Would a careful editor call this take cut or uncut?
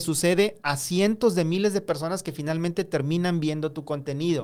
uncut